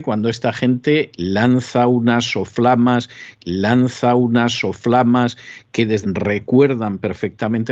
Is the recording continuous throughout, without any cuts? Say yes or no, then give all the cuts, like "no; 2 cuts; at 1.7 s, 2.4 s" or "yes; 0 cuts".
no; 2 cuts; at 3.4 s, 6.0 s